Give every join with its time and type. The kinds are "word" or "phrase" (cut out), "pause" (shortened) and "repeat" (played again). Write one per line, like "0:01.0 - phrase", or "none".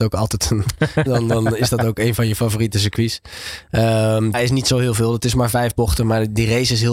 0:01.1 - word
0:04.3 - word